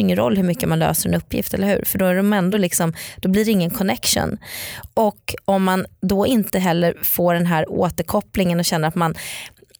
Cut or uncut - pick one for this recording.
uncut